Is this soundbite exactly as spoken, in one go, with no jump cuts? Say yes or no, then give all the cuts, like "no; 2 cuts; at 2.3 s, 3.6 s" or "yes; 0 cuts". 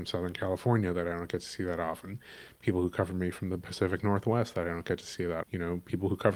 no; 1 cut; at 5.4 s